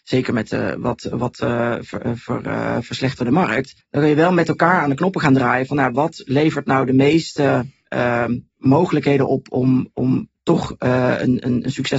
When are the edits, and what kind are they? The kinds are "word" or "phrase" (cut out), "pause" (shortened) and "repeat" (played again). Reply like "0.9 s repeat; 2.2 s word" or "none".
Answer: 3.8 s pause; 8.5 s pause